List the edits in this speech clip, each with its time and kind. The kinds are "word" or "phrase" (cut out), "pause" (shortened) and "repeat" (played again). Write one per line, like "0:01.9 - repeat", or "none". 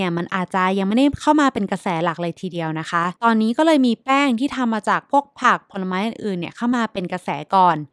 0:03.2 - pause